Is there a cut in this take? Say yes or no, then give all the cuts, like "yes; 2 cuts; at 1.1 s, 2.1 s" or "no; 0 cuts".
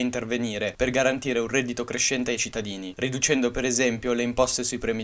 no; 0 cuts